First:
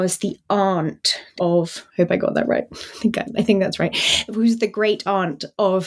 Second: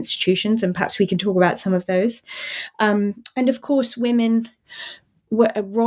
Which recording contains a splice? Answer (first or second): first